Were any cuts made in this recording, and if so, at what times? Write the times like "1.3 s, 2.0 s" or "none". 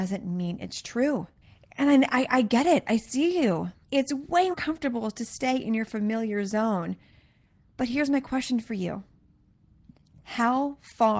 1.4 s, 3.8 s, 4.5 s